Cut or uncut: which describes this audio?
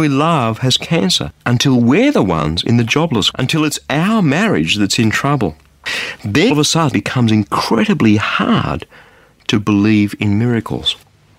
cut